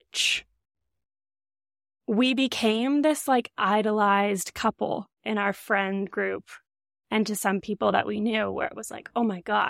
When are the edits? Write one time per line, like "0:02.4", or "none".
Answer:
none

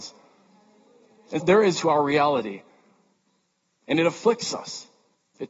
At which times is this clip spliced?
0:01.4
0:01.7

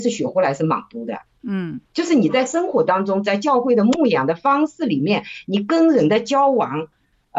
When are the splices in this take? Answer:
0:01.9

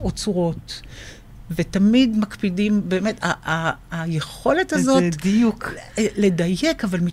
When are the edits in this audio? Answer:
none

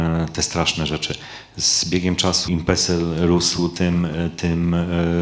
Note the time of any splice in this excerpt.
0:02.5

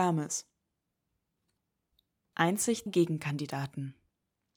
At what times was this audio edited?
0:02.9

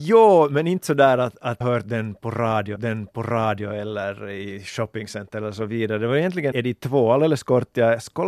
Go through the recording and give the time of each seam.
0:01.6
0:02.8
0:06.5

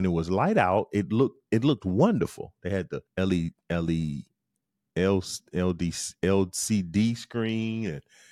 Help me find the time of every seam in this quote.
0:03.1

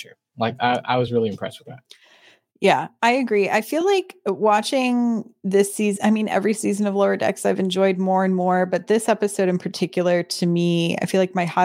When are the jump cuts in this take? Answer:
none

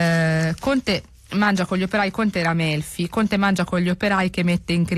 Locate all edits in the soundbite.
none

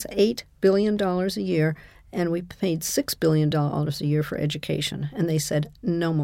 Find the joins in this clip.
none

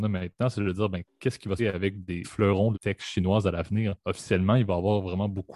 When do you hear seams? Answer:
0:01.6
0:02.2
0:02.7
0:04.0

